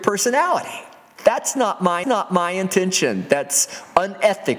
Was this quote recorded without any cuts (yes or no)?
no